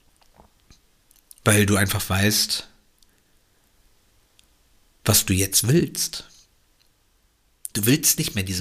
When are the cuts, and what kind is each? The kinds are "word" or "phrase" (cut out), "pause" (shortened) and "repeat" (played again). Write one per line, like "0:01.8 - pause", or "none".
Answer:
none